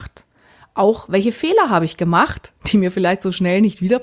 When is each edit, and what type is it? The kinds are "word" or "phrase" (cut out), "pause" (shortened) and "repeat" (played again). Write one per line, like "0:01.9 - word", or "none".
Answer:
none